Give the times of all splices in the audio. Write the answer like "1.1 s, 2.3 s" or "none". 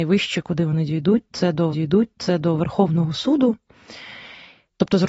1.7 s